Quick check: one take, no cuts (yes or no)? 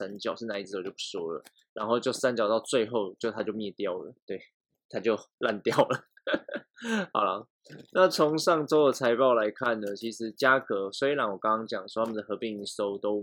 no